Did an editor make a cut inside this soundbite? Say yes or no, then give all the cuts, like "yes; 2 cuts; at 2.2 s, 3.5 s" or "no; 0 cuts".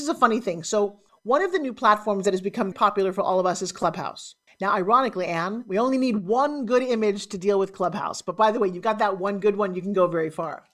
yes; 3 cuts; at 1.1 s, 2.7 s, 4.5 s